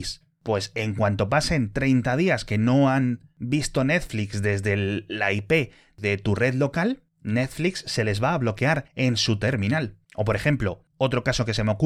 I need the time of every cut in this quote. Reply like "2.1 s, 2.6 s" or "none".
8.9 s, 10.0 s